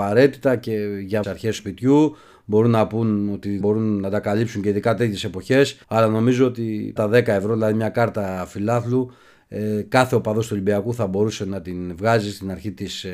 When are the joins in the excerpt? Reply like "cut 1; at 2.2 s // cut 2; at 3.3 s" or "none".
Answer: cut 1; at 1.2 s // cut 2; at 1.6 s // cut 3; at 3.6 s // cut 4; at 5.8 s // cut 5; at 7.0 s